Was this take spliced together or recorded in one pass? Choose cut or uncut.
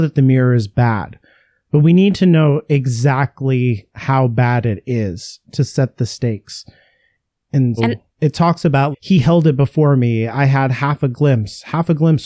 cut